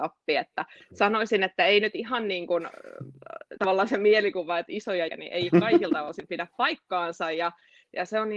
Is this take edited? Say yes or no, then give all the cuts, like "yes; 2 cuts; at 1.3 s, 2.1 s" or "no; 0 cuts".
yes; 1 cut; at 5.1 s